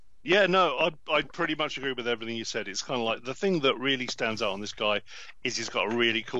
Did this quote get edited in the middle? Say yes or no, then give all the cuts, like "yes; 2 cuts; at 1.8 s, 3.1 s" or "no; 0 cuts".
no; 0 cuts